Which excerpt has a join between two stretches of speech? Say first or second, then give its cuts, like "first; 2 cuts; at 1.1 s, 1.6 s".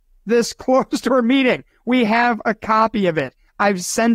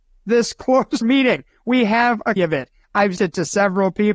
second; 3 cuts; at 1.0 s, 2.4 s, 3.2 s